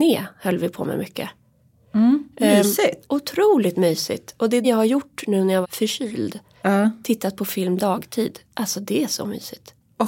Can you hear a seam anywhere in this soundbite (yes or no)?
yes